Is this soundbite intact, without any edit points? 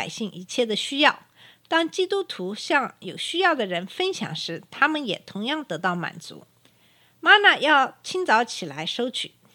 yes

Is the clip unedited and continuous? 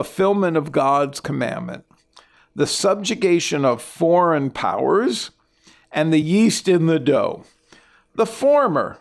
yes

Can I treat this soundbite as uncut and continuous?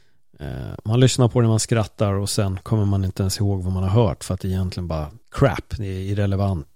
no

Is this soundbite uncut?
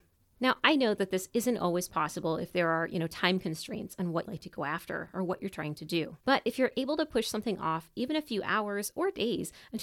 no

